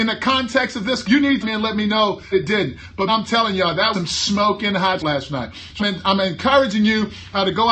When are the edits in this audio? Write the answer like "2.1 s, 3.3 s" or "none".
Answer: 1.0 s, 1.4 s, 2.3 s, 3.1 s, 3.9 s, 5.0 s, 5.8 s